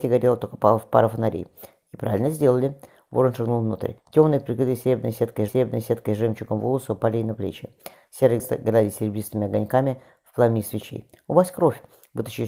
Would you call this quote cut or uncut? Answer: cut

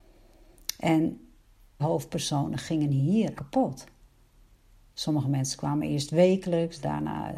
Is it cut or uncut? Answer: cut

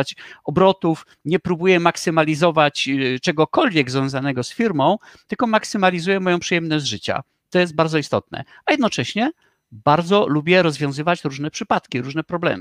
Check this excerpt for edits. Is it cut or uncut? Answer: uncut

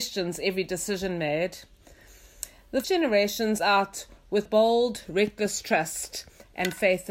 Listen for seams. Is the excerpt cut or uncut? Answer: cut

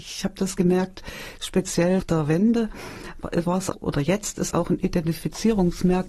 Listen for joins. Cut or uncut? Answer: cut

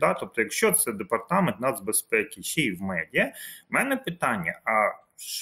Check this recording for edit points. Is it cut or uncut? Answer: uncut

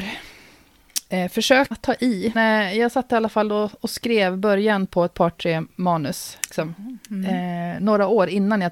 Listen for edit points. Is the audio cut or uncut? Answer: cut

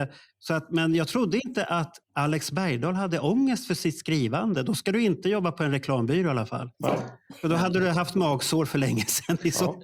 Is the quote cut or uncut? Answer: cut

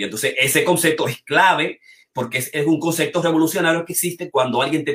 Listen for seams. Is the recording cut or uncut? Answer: uncut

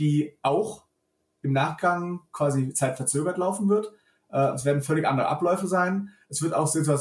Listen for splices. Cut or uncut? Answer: uncut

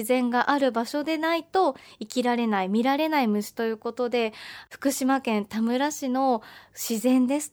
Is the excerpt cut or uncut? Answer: uncut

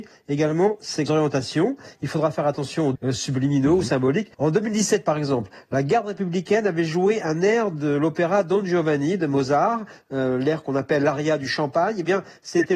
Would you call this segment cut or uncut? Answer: cut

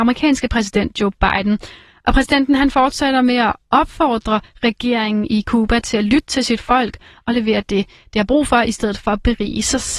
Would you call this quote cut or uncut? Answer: uncut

